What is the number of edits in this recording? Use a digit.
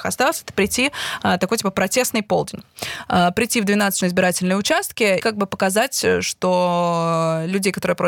2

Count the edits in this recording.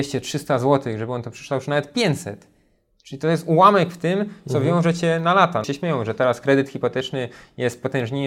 1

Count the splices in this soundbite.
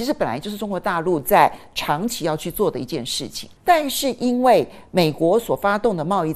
1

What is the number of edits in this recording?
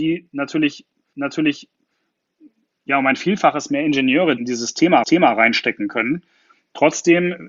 3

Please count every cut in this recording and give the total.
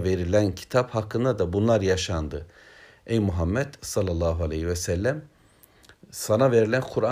0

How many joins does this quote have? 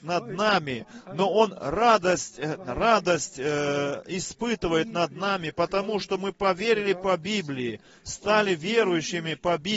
0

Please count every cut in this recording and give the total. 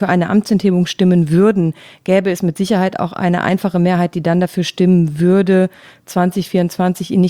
0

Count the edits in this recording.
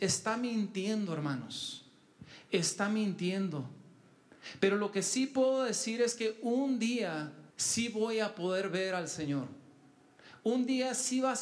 1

